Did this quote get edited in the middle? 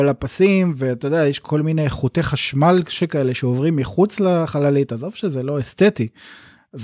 no; 0 cuts

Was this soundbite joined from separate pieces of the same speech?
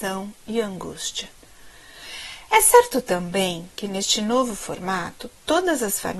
no; 0 cuts

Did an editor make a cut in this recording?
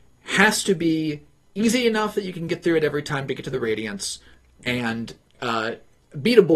no; 0 cuts

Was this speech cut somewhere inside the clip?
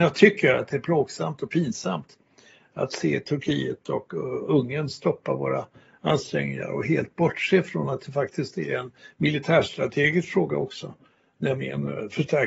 no; 0 cuts

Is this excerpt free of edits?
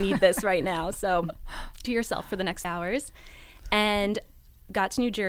no; 2 cuts; at 1.8 s, 2.6 s

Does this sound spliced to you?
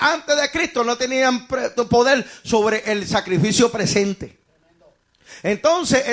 no; 0 cuts

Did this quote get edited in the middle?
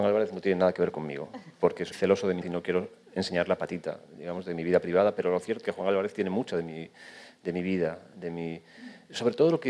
yes; 3 cuts; at 1.9 s, 2.4 s, 5.6 s

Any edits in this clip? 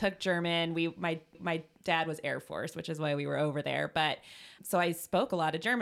yes; 2 cuts; at 1.3 s, 4.6 s

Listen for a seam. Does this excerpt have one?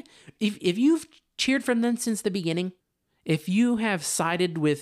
no; 0 cuts

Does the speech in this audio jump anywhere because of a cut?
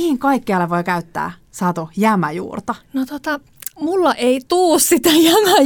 yes; 4 cuts; at 1.4 s, 2.8 s, 3.7 s, 4.5 s

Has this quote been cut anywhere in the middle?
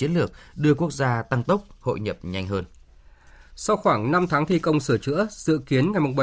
no; 0 cuts

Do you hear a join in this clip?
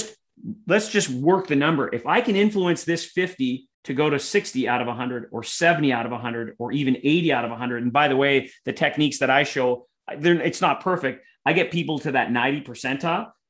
yes; 1 cut; at 3.7 s

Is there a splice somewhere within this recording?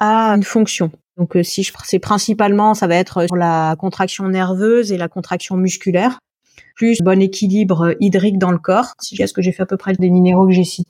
yes; 5 cuts; at 1.7 s, 3.3 s, 7.0 s, 9.2 s, 10.0 s

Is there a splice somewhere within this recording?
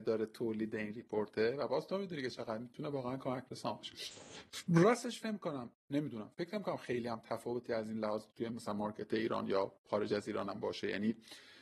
yes; 1 cut; at 5.2 s

